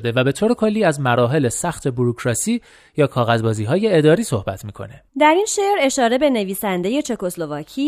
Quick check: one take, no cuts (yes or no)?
no